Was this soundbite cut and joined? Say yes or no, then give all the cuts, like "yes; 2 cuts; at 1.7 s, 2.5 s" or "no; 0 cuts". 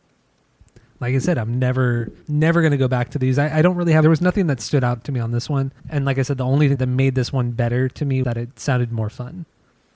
yes; 5 cuts; at 2.2 s, 4.0 s, 5.8 s, 6.8 s, 8.2 s